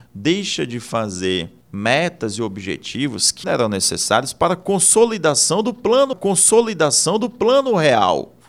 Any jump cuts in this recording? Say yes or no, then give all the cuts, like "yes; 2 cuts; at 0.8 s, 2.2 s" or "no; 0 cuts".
yes; 3 cuts; at 1.6 s, 3.4 s, 6.1 s